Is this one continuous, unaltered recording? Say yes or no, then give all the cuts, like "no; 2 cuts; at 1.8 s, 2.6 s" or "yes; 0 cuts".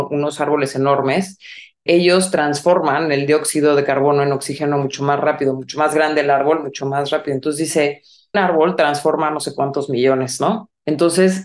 no; 2 cuts; at 1.9 s, 8.3 s